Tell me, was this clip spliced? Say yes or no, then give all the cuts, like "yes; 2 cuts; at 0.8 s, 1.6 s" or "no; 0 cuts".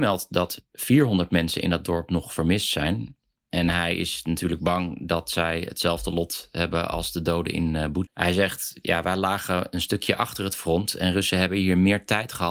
yes; 1 cut; at 8.1 s